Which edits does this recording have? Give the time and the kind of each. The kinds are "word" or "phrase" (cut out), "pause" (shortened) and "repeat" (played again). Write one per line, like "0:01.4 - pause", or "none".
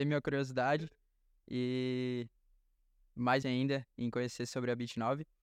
0:03.4 - word